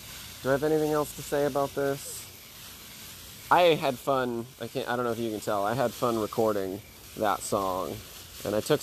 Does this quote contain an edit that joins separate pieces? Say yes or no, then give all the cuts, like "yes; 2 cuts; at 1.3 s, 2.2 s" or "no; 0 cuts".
no; 0 cuts